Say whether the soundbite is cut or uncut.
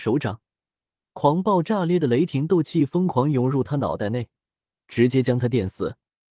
uncut